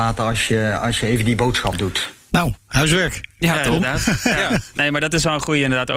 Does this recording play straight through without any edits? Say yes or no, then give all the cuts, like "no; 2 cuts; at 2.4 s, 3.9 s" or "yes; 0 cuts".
yes; 0 cuts